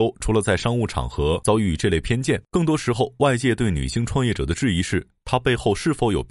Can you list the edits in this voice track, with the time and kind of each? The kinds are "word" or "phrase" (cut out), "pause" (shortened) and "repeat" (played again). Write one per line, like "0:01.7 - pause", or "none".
0:02.5 - pause